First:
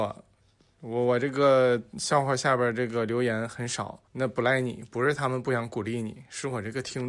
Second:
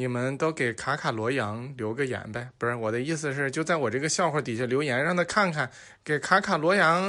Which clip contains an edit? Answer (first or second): first